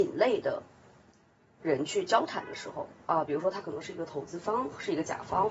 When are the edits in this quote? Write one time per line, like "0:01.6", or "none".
none